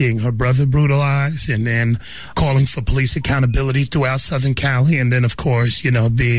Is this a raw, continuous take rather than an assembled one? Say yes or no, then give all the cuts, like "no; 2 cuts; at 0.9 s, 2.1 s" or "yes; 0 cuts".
no; 1 cut; at 2.3 s